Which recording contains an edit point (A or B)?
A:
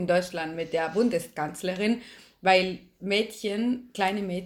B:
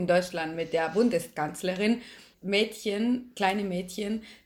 B